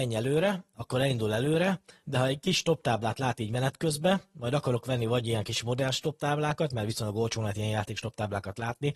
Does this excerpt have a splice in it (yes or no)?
no